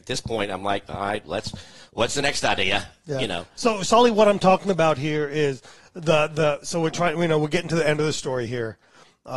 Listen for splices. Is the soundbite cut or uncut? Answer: uncut